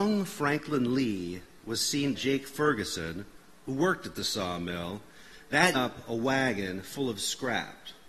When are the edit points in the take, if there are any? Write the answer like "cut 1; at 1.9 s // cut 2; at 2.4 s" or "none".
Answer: cut 1; at 2.1 s // cut 2; at 5.7 s